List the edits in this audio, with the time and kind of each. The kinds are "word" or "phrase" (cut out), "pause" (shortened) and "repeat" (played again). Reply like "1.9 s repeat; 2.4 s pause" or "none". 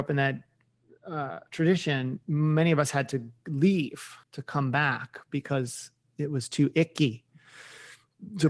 4.2 s pause

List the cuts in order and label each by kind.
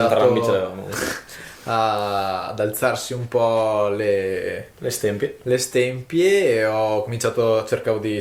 none

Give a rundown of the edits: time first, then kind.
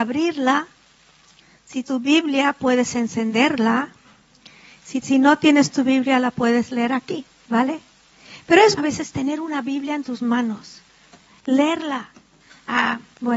1.8 s word; 5.0 s word; 8.8 s word

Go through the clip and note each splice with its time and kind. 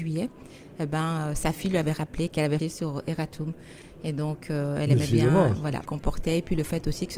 2.6 s word; 5.9 s phrase

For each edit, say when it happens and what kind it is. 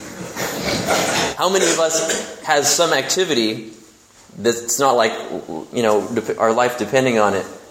none

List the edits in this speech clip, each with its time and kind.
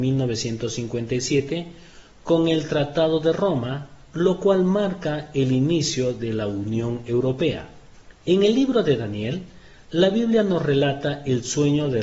none

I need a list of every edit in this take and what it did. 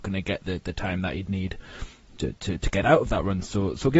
none

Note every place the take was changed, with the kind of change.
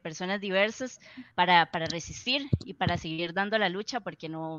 1.3 s pause

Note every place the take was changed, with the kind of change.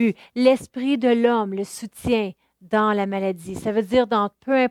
none

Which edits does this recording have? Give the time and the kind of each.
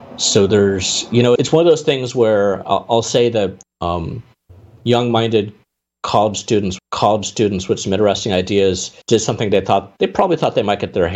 1.4 s word; 2.6 s word; 3.6 s phrase; 6.8 s repeat; 9.0 s pause

